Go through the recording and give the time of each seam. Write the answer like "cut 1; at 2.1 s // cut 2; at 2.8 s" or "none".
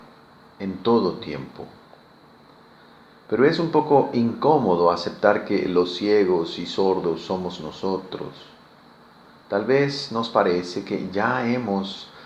none